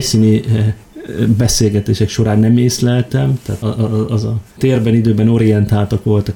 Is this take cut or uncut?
cut